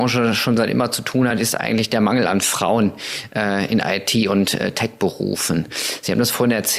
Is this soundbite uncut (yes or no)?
yes